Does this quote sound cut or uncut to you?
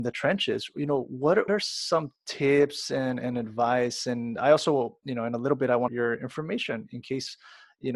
cut